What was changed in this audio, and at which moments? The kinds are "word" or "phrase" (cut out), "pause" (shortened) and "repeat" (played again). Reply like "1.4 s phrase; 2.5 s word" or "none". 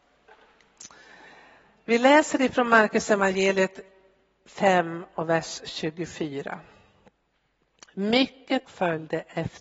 8.7 s word